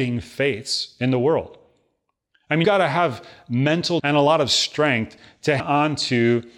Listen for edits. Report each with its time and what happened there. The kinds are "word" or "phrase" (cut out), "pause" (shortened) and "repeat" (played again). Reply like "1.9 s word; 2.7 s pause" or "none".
2.6 s word; 4.0 s word; 5.6 s word